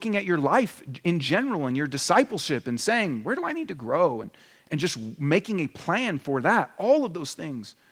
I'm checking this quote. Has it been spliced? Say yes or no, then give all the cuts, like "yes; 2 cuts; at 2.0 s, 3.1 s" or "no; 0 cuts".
no; 0 cuts